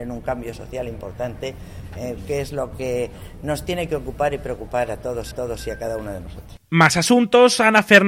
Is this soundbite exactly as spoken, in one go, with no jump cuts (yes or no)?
no